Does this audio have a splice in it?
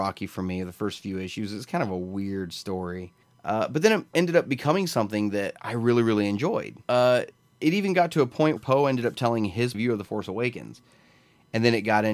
yes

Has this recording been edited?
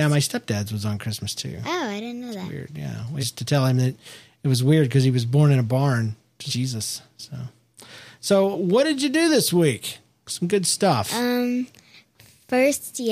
yes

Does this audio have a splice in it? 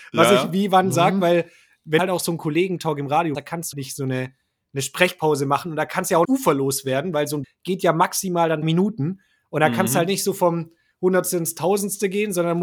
yes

